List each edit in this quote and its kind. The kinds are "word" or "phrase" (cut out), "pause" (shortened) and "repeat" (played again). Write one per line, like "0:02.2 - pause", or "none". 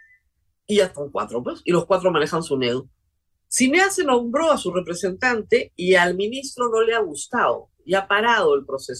0:03.1 - pause